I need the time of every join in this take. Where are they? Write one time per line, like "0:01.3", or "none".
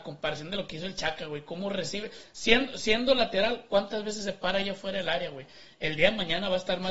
none